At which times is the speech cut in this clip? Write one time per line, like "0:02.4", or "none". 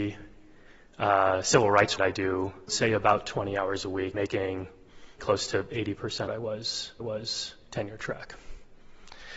0:02.0
0:02.7
0:04.1
0:05.2
0:06.3
0:07.0